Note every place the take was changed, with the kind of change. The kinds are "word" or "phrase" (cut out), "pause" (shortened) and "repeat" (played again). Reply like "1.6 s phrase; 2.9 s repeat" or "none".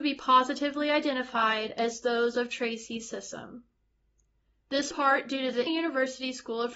4.9 s phrase; 5.7 s word